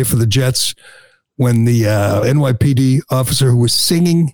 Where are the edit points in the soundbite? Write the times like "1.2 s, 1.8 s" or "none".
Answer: 2.2 s